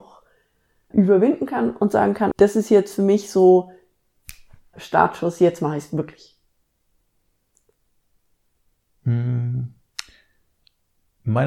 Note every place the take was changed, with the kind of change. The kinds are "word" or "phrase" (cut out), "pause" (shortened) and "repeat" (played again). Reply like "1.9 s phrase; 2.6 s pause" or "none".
0.9 s word; 2.3 s word; 4.7 s word